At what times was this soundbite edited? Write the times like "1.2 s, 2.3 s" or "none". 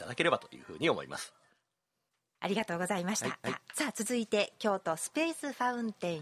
2.1 s, 3.4 s